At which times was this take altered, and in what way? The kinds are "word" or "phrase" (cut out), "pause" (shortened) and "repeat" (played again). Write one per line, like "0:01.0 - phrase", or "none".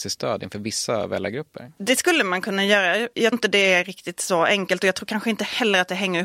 0:03.3 - word